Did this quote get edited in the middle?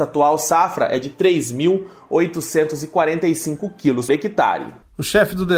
yes; 1 cut; at 4.1 s

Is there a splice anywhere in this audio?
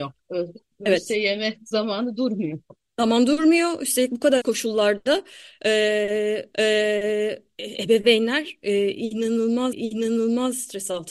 yes; 3 cuts; at 4.4 s, 6.5 s, 9.7 s

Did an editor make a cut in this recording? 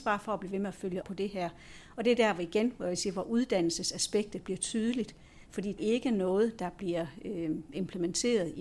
yes; 2 cuts; at 1.0 s, 5.8 s

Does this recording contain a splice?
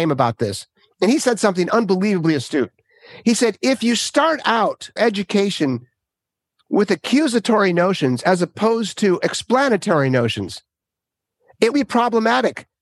yes; 2 cuts; at 5.0 s, 11.7 s

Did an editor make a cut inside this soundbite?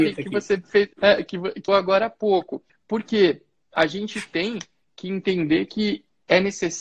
yes; 3 cuts; at 0.9 s, 1.7 s, 2.7 s

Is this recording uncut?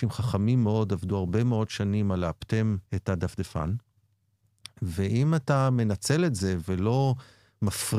no; 1 cut; at 2.9 s

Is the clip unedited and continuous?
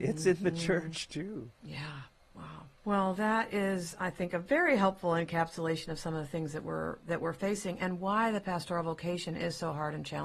no; 2 cuts; at 1.5 s, 2.7 s

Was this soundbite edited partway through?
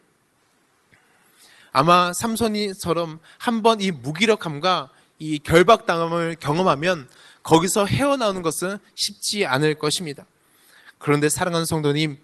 no; 0 cuts

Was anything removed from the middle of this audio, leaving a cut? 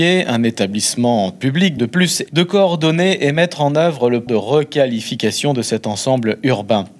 yes; 3 cuts; at 1.8 s, 2.3 s, 4.3 s

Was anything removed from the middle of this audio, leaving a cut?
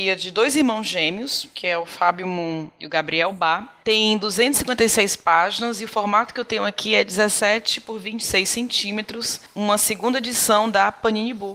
no; 0 cuts

